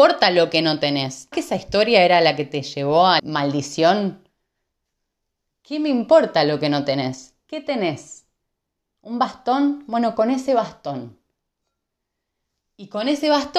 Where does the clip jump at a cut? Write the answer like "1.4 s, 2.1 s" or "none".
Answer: 1.3 s, 3.2 s